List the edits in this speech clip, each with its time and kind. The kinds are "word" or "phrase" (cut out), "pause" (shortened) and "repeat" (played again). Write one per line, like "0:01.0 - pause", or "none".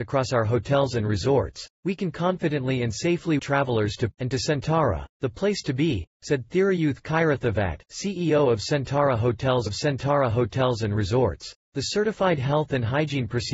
0:01.7 - pause
0:03.4 - phrase
0:04.1 - word
0:05.1 - pause
0:07.8 - pause
0:09.7 - repeat
0:11.6 - pause